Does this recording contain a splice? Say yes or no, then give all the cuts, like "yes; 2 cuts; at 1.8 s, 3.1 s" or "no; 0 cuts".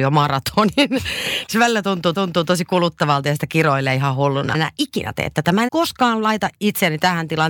yes; 4 cuts; at 1.5 s, 2.1 s, 4.5 s, 5.7 s